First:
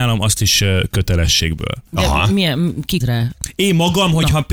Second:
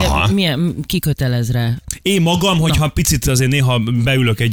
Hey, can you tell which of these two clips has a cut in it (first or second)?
first